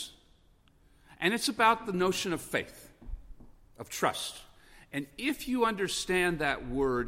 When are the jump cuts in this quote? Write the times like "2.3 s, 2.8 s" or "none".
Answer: none